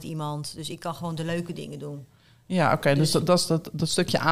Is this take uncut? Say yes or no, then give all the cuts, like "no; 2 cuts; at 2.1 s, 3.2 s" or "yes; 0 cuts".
yes; 0 cuts